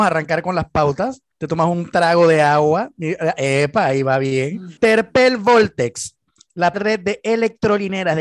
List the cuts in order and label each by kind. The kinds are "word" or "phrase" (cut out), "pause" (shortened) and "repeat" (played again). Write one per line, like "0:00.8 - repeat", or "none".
0:01.3 - pause
0:04.8 - pause
0:06.7 - word